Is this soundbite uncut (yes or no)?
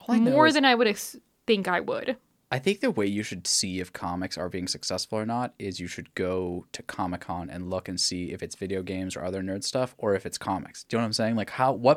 yes